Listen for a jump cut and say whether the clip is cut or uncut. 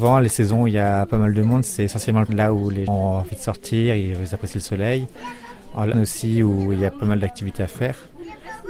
cut